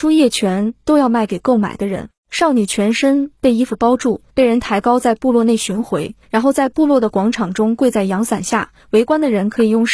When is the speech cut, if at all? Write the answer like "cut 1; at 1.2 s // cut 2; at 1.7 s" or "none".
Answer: cut 1; at 2.2 s // cut 2; at 4.3 s // cut 3; at 6.2 s // cut 4; at 8.8 s